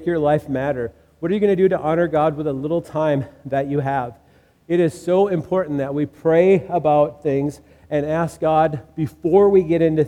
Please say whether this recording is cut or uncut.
uncut